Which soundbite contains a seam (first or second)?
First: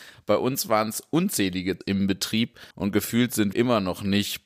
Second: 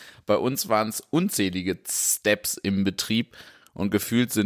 first